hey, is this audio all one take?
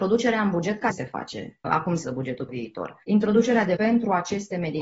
no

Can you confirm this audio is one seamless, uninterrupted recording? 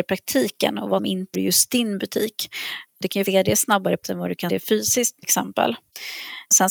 no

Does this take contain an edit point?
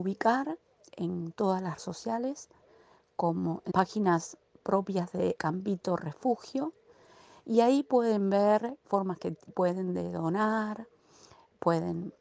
yes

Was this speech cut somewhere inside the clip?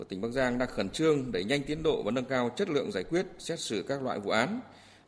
no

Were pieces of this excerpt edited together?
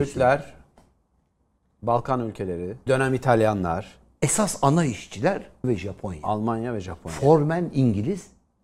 yes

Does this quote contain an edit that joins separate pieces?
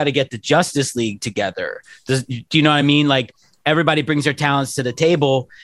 no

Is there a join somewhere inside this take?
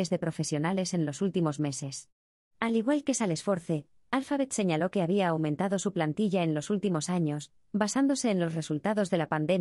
no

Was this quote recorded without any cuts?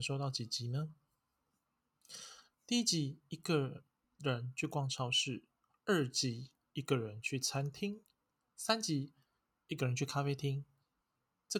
yes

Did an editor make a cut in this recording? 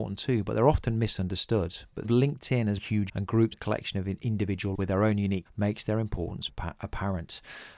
yes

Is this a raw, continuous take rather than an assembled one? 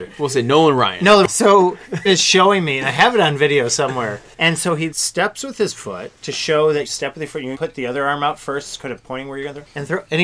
no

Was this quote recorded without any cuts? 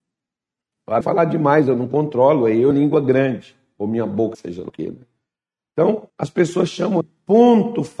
no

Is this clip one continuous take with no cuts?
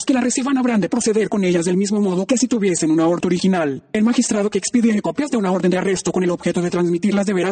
no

